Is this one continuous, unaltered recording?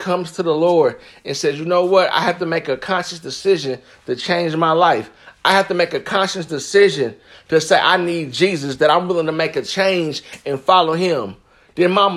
yes; 0 cuts

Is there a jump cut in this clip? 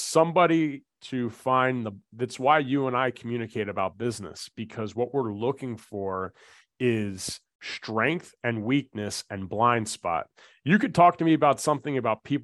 no; 0 cuts

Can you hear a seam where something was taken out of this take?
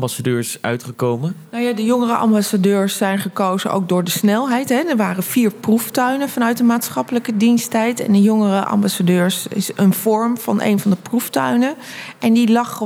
no; 0 cuts

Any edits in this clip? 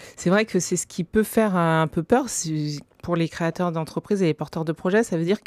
no; 0 cuts

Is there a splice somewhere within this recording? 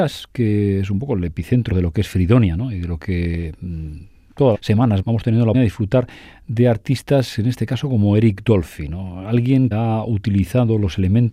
yes; 5 cuts; at 1.7 s, 4.5 s, 5.0 s, 5.5 s, 9.7 s

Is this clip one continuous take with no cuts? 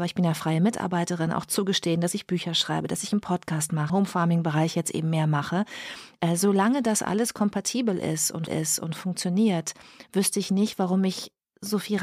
no; 2 cuts; at 3.9 s, 8.5 s

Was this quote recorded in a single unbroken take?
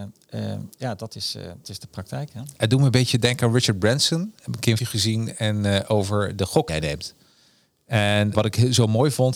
no; 4 cuts; at 1.6 s, 4.8 s, 6.7 s, 8.3 s

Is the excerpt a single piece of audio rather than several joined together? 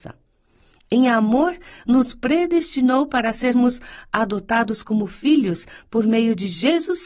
yes; 0 cuts

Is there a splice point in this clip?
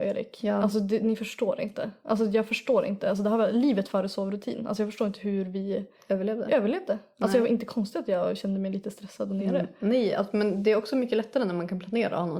no; 0 cuts

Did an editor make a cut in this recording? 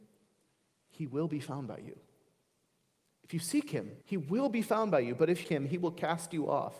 yes; 2 cuts; at 4.0 s, 5.4 s

